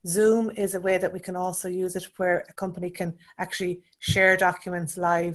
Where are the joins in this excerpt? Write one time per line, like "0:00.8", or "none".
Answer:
none